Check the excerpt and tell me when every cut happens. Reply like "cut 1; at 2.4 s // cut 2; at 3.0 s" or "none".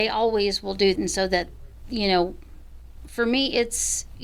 cut 1; at 1.0 s